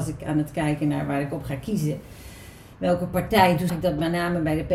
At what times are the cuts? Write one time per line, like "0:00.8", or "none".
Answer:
0:03.7